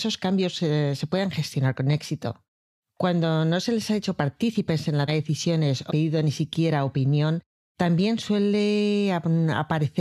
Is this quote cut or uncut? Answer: cut